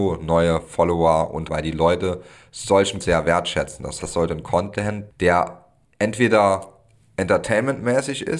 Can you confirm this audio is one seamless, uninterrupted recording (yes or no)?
no